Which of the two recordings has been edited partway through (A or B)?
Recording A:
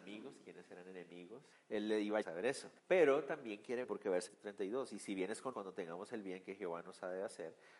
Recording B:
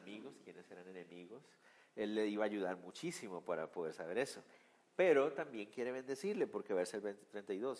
A